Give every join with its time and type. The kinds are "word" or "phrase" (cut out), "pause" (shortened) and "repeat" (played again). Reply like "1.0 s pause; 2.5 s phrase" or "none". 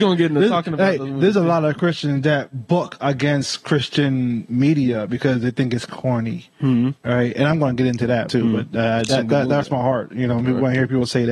8.3 s word; 9.1 s word; 9.6 s word